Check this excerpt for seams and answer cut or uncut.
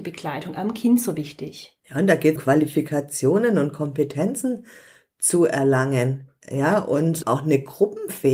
cut